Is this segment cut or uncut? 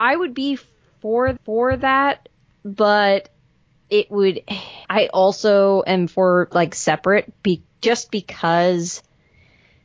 cut